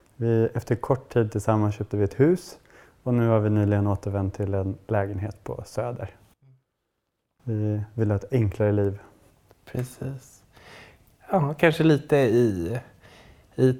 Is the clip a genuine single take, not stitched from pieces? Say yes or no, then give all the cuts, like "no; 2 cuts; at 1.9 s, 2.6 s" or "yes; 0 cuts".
yes; 0 cuts